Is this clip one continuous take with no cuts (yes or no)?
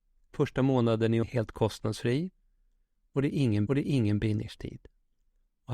no